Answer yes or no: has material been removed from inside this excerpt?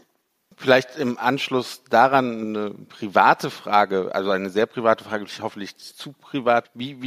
yes